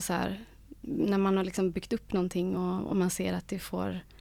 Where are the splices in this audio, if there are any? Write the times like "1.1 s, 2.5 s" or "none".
none